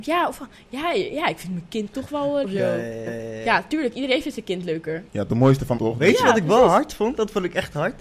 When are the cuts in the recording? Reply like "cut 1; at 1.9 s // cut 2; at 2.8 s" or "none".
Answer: cut 1; at 2.4 s // cut 2; at 3.1 s // cut 3; at 5.1 s // cut 4; at 5.8 s